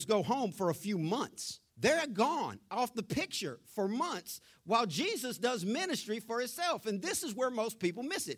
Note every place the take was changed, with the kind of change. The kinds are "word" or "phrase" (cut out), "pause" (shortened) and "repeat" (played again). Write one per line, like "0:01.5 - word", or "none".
0:01.7 - pause